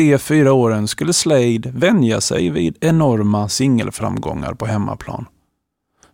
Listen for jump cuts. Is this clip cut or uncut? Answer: uncut